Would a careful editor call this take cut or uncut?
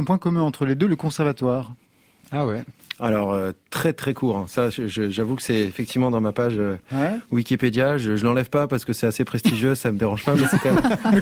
uncut